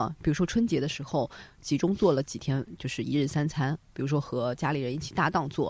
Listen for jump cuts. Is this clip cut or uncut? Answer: uncut